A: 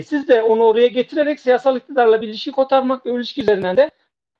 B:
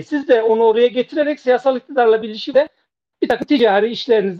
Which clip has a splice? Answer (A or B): B